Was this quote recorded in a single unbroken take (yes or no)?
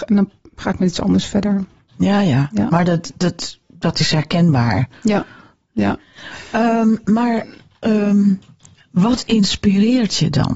yes